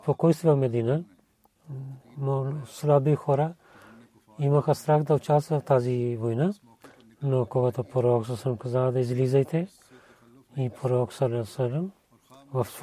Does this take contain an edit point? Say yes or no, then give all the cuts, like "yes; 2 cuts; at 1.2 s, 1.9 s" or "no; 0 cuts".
no; 0 cuts